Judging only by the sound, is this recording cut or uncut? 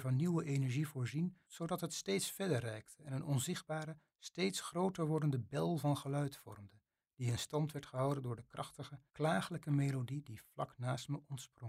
cut